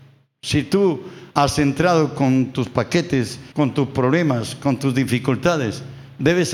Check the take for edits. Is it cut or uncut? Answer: cut